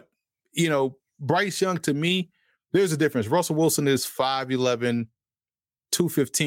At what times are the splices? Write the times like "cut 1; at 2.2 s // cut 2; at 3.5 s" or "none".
none

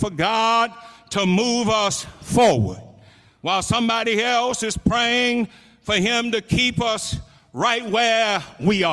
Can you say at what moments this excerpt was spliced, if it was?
none

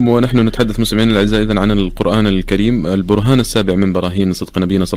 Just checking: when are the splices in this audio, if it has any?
none

